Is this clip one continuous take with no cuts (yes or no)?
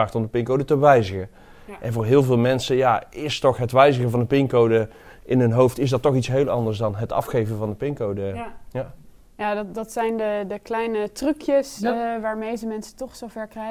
yes